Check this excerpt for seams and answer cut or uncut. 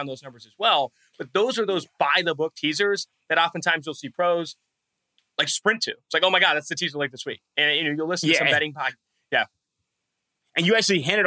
uncut